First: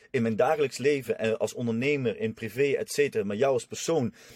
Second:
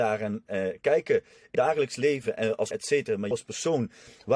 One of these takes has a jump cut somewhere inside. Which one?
second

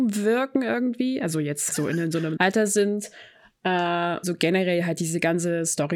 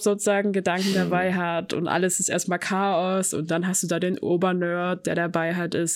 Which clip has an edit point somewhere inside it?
first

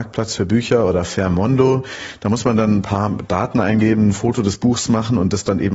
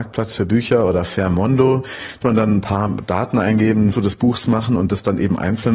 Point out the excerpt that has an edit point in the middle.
second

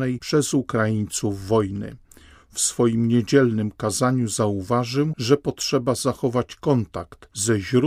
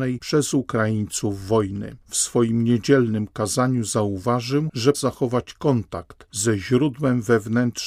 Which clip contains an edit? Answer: second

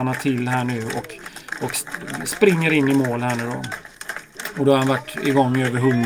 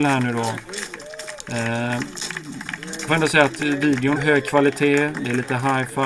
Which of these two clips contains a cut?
second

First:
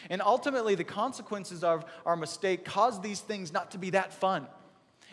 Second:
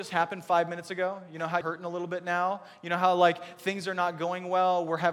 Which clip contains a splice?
second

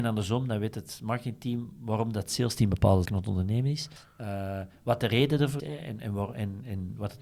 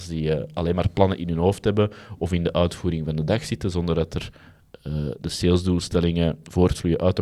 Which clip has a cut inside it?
first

